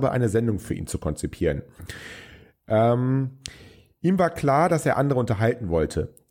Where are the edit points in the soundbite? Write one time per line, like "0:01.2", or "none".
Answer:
none